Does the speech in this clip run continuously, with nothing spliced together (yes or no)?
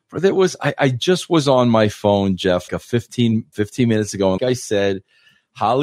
no